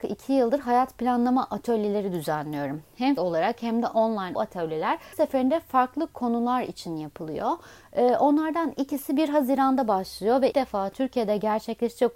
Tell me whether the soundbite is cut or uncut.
cut